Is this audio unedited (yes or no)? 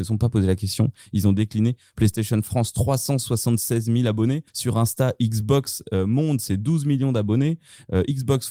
no